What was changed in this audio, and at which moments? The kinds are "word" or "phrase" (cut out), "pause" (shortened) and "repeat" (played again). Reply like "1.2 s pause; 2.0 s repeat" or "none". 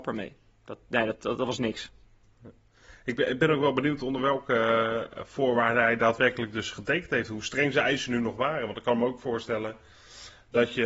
none